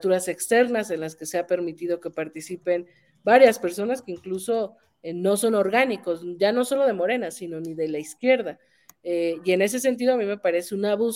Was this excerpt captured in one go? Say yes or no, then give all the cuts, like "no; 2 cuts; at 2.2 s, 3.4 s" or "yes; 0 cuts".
yes; 0 cuts